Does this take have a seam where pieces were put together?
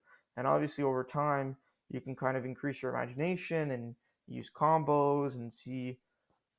no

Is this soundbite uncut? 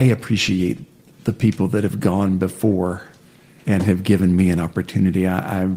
yes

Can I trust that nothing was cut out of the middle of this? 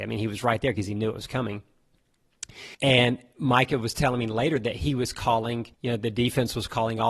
no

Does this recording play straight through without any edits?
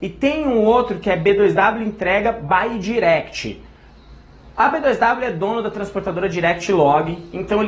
yes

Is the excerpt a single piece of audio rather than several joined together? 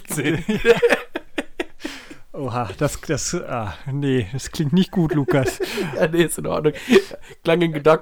yes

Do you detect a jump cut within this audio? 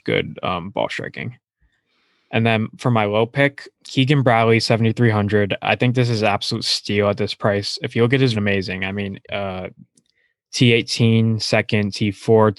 yes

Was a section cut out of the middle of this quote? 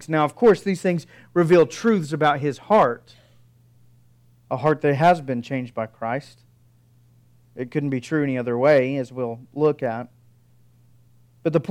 no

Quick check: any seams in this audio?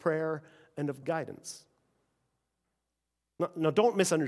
yes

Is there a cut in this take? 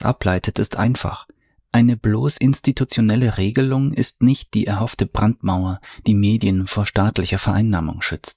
no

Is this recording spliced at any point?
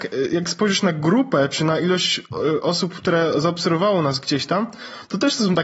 no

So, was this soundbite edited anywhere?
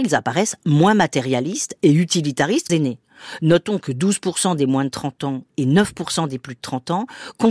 yes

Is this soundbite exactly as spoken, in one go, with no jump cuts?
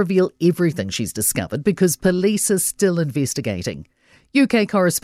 yes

